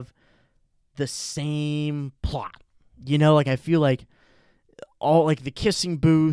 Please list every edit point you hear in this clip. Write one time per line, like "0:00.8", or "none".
none